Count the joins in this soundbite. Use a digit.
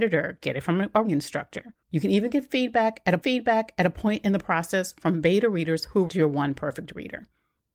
4